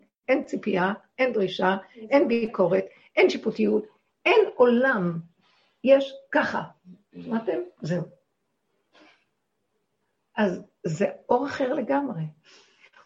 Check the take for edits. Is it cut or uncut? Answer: uncut